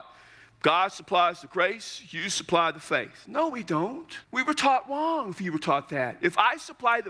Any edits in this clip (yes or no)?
yes